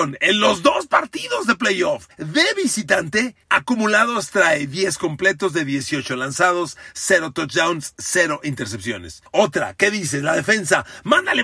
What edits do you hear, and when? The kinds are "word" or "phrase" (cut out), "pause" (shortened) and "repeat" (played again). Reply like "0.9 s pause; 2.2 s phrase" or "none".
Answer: 2.1 s pause; 3.4 s pause; 9.3 s pause